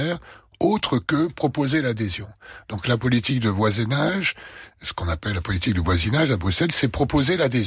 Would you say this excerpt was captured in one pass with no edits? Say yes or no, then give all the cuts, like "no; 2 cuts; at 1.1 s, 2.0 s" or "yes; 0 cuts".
yes; 0 cuts